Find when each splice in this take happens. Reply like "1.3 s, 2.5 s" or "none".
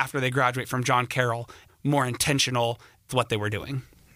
1.7 s, 3.1 s